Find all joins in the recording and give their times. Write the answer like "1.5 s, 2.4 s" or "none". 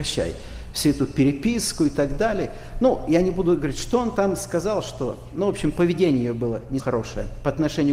6.8 s